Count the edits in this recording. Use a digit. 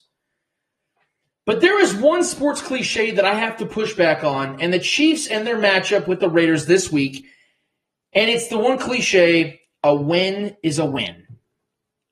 0